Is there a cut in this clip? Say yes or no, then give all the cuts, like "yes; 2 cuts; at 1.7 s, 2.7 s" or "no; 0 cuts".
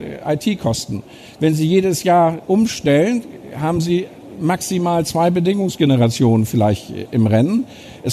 no; 0 cuts